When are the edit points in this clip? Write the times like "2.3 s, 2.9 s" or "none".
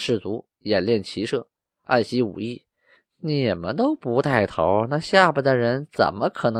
none